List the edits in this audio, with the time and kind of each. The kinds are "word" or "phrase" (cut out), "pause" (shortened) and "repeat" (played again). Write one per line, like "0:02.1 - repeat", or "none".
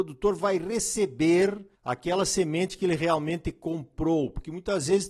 0:01.7 - pause